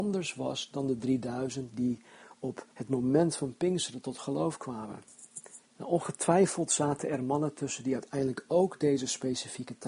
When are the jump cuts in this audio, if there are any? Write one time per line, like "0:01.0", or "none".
0:02.7
0:05.7

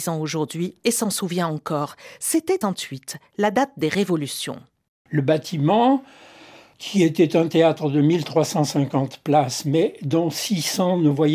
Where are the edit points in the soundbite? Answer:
0:02.6

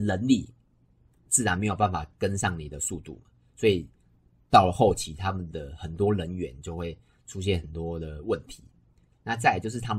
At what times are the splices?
none

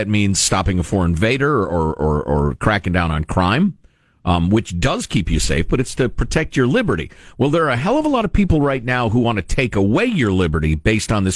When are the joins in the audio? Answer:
none

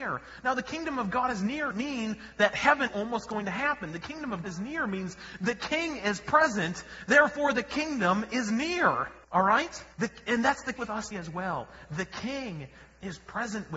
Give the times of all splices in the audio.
0:01.7
0:02.9
0:04.4
0:09.2
0:09.9
0:10.8
0:11.1

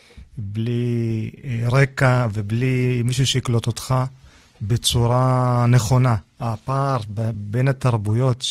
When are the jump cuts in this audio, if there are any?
none

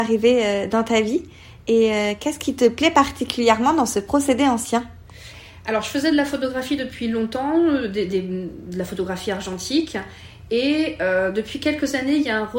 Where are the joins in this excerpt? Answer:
none

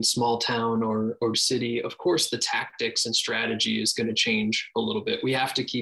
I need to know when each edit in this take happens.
0:01.3

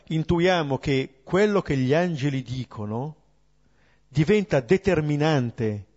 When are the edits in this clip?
none

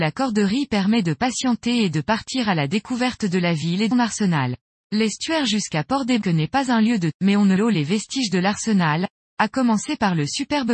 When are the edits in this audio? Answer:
0:03.9
0:04.6
0:06.2
0:07.1
0:07.6

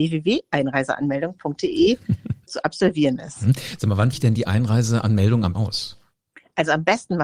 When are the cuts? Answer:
0:02.5
0:04.1
0:05.5

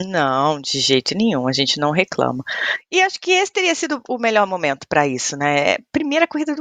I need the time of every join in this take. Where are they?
none

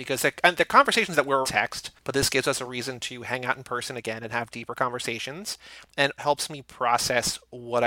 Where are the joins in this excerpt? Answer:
0:01.4
0:06.2

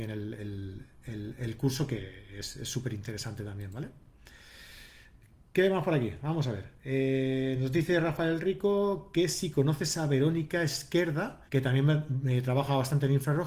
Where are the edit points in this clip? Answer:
0:11.5

